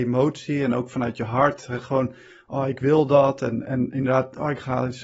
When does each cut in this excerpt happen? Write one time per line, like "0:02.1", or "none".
none